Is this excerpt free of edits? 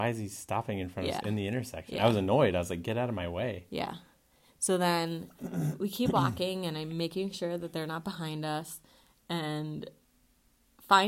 yes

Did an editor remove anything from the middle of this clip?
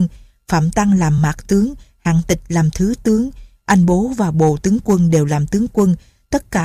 no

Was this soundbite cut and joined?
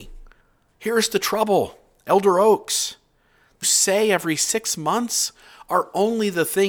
yes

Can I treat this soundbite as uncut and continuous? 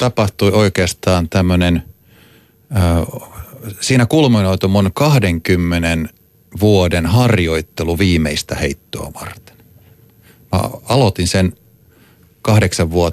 yes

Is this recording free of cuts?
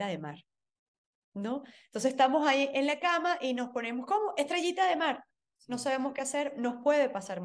yes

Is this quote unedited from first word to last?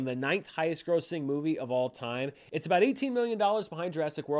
yes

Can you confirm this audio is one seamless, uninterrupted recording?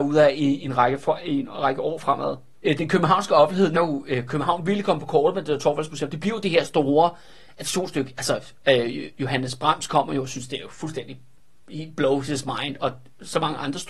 no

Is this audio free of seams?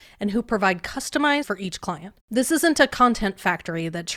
no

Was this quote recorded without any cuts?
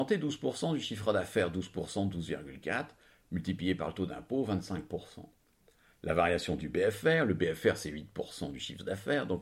yes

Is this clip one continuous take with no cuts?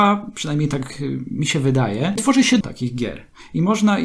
no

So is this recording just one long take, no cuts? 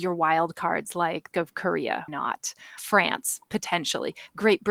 no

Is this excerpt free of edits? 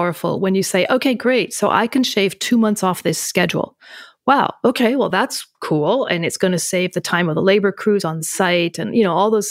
yes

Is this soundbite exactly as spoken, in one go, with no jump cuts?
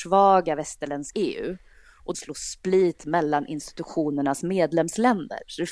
no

